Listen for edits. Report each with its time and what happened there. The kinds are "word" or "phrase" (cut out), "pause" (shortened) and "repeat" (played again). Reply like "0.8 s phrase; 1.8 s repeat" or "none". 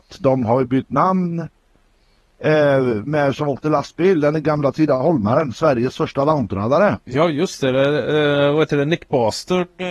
none